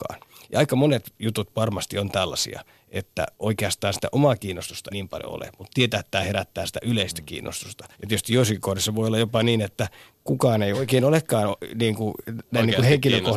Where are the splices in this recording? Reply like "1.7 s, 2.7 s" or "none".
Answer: 3.3 s, 4.9 s, 7.9 s, 10.7 s